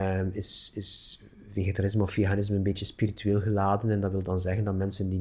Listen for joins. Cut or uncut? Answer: uncut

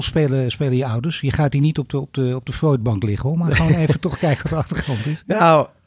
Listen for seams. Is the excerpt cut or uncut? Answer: uncut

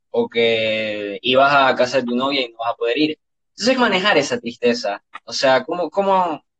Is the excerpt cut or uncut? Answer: cut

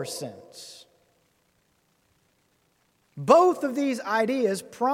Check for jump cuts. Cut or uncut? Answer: uncut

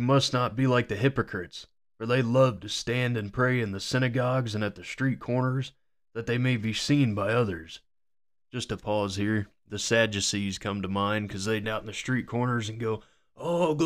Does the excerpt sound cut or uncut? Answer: cut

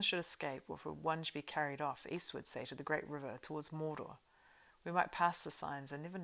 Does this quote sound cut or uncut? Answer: uncut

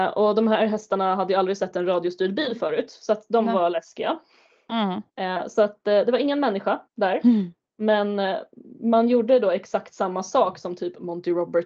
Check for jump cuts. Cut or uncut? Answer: cut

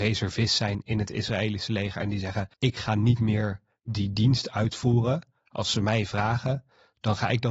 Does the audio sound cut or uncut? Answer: cut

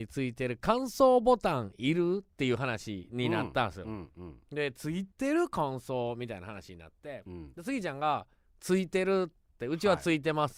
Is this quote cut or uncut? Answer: cut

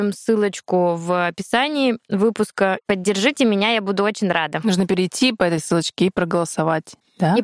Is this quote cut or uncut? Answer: uncut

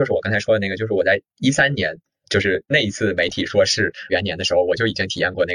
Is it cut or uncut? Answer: cut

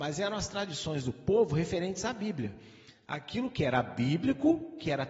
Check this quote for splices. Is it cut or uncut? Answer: uncut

